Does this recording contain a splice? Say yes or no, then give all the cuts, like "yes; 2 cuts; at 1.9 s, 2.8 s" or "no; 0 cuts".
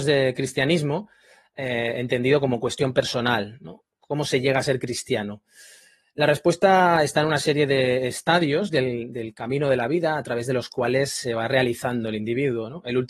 no; 0 cuts